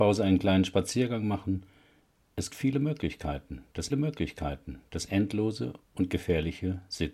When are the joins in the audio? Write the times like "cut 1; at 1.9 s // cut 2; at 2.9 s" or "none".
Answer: cut 1; at 2.5 s // cut 2; at 3.9 s